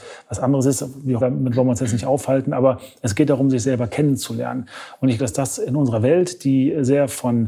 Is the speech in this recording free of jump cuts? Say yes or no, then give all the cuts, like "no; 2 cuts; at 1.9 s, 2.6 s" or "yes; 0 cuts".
no; 2 cuts; at 1.2 s, 5.2 s